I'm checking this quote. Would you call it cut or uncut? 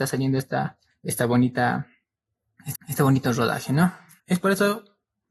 cut